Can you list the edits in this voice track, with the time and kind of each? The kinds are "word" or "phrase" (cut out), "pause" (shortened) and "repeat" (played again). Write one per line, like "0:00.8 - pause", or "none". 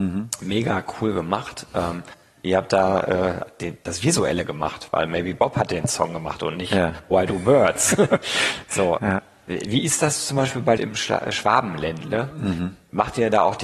0:09.0 - word
0:10.8 - phrase